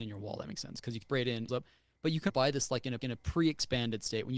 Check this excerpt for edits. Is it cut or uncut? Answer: cut